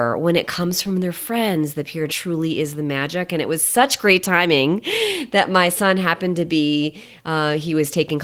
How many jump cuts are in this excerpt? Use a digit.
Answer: 1